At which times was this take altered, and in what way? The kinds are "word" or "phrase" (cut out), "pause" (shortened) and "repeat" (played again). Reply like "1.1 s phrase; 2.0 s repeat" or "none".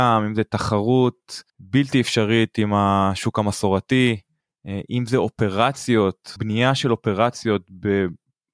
1.5 s pause; 6.4 s word